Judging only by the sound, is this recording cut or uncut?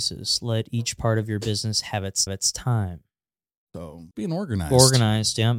cut